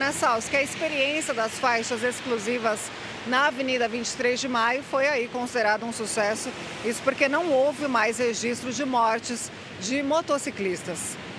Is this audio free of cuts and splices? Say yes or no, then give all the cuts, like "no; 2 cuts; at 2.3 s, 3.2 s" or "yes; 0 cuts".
yes; 0 cuts